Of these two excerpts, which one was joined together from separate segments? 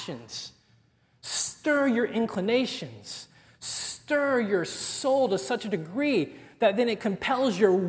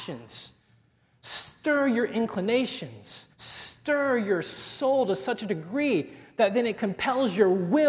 second; 1 cut; at 3.3 s

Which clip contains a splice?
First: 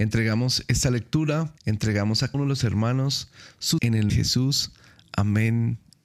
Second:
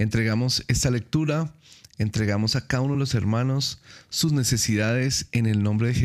first; 4 cuts; at 1.6 s, 2.3 s, 3.8 s, 4.1 s

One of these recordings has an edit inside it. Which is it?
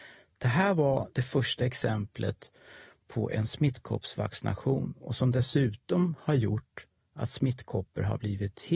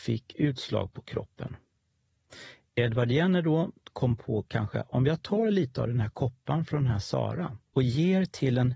second; 1 cut; at 7.7 s

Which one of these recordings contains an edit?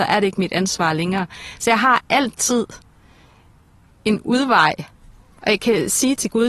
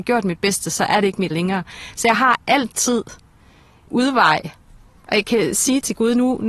second; 2 cuts; at 1.3 s, 3.9 s

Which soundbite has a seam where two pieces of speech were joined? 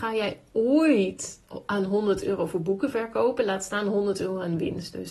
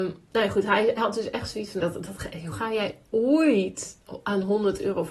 second; 3 cuts; at 1.0 s, 1.8 s, 2.5 s

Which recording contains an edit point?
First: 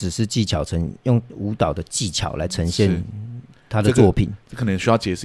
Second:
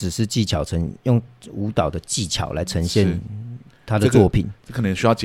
first; 1 cut; at 1.3 s

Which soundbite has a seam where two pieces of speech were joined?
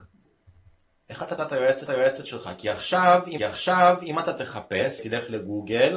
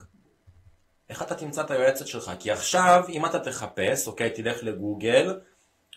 first; 4 cuts; at 1.4 s, 1.9 s, 3.4 s, 5.0 s

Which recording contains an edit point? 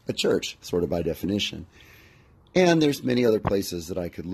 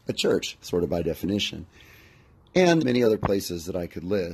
second; 1 cut; at 2.8 s

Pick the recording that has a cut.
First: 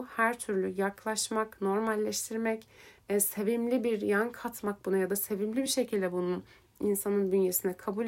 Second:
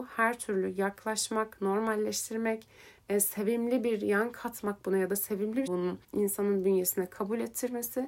second; 2 cuts; at 5.7 s, 6.0 s

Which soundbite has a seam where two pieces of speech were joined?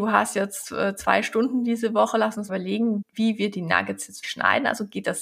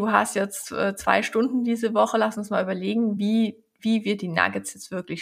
first; 3 cuts; at 2.5 s, 3.0 s, 4.2 s

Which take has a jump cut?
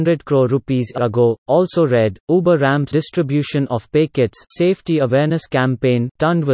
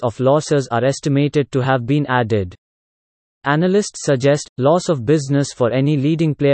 first; 3 cuts; at 1.0 s, 2.9 s, 4.5 s

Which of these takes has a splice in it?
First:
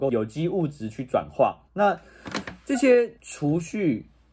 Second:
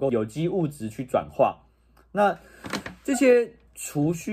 first; 2 cuts; at 1.7 s, 3.2 s

